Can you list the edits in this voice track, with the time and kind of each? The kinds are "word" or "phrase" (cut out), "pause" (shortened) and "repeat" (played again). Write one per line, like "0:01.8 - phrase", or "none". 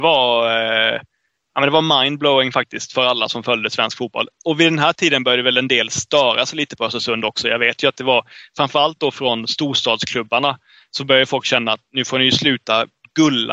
none